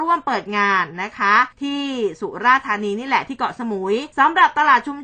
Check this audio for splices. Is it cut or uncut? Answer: cut